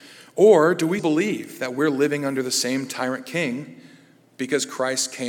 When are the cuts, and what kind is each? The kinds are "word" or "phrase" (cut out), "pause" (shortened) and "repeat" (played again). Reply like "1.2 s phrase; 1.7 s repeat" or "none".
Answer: 1.0 s word